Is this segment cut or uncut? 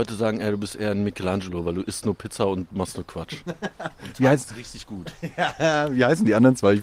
uncut